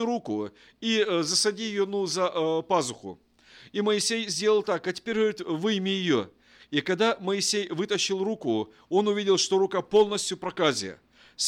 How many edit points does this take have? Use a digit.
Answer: 0